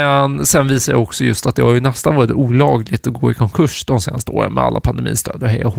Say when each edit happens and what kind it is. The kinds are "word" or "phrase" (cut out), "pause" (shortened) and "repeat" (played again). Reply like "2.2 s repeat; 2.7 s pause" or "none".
none